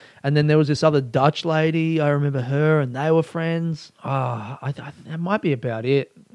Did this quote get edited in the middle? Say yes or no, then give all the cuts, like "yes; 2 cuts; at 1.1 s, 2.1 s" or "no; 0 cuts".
yes; 1 cut; at 3.9 s